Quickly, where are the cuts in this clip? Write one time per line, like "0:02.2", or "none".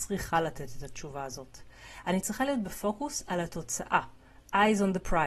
none